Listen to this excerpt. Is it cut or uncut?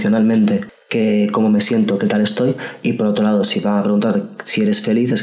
uncut